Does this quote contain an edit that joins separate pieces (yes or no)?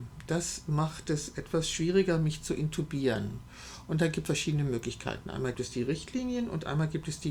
yes